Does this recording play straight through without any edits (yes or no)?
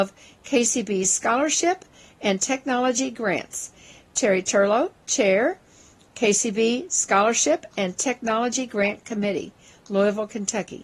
yes